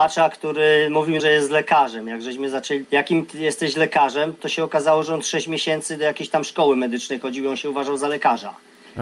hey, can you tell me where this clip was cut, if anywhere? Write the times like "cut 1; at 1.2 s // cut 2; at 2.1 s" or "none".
cut 1; at 1.2 s // cut 2; at 2.8 s // cut 3; at 4.4 s